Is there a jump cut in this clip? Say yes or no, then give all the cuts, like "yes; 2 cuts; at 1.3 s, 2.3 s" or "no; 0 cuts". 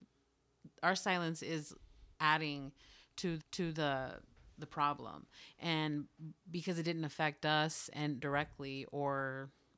yes; 2 cuts; at 2.1 s, 3.4 s